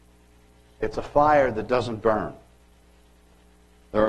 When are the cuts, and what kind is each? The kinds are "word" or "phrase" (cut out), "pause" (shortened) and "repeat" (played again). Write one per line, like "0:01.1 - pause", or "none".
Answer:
none